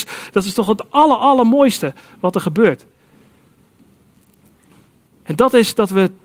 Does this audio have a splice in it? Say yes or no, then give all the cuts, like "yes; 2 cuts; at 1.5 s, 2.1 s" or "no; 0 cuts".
no; 0 cuts